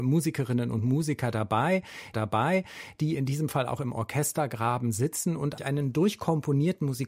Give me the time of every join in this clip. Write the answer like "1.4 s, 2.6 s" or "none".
2.1 s, 5.6 s